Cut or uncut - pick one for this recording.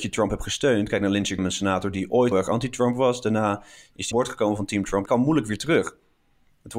cut